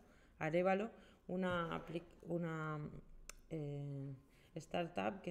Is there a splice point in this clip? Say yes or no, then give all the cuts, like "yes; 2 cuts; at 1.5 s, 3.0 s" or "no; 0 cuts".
yes; 1 cut; at 2.2 s